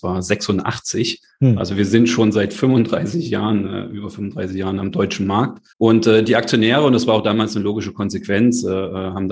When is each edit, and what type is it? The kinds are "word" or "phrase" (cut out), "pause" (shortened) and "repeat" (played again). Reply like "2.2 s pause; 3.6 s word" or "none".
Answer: 4.8 s word; 5.7 s pause

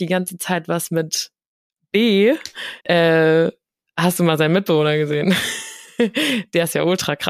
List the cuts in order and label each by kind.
2.8 s pause

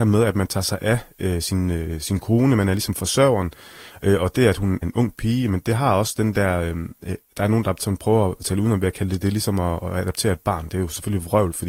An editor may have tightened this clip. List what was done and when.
4.8 s word

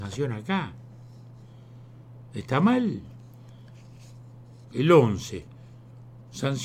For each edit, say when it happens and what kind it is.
none

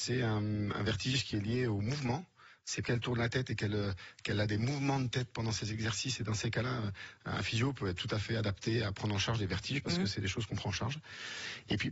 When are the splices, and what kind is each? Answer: 2.8 s word

